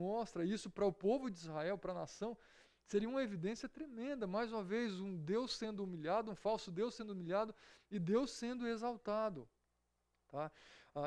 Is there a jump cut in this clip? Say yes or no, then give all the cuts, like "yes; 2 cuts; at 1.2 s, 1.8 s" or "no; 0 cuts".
no; 0 cuts